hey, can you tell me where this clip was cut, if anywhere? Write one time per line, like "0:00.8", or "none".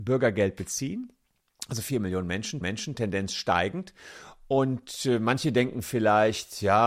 0:02.6